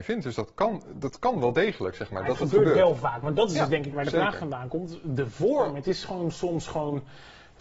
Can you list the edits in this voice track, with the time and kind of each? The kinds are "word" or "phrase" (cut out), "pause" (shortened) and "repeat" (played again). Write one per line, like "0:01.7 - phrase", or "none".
0:03.9 - word

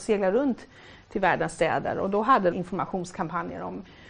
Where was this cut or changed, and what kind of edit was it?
0:02.5 - phrase

